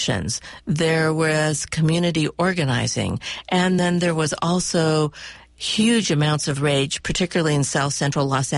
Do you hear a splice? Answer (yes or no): no